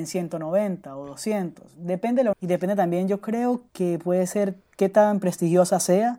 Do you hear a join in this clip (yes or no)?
yes